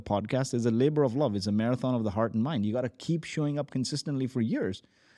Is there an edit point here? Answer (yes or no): no